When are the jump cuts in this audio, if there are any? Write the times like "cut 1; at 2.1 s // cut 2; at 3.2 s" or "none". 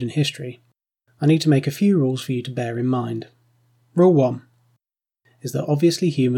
none